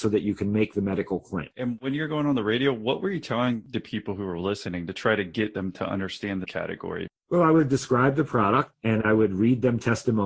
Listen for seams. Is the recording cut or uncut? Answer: uncut